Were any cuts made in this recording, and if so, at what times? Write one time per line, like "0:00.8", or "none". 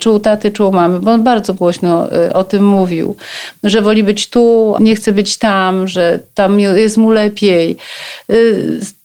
0:04.8